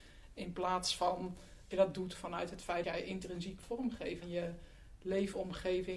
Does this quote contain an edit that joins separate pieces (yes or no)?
yes